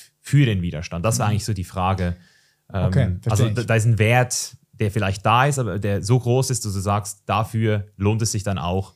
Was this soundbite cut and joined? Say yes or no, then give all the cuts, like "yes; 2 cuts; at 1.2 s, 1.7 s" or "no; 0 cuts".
no; 0 cuts